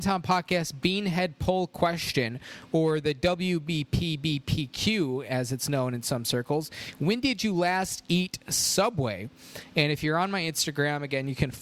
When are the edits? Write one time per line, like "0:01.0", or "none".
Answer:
none